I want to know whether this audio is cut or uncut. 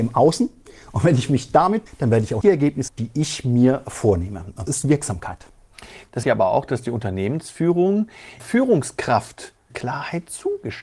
cut